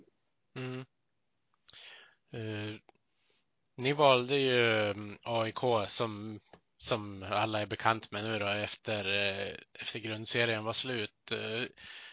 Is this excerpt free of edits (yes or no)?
yes